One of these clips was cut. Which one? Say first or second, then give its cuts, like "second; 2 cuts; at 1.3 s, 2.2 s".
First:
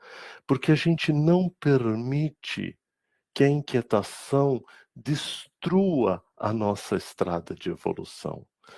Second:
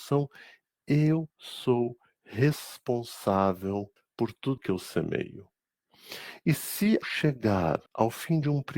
second; 5 cuts; at 1.3 s, 4.0 s, 4.6 s, 7.0 s, 7.9 s